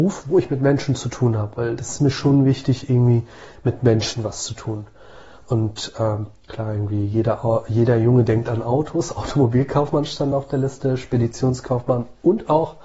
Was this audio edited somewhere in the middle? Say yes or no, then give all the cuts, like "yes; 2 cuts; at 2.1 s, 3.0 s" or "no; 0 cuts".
no; 0 cuts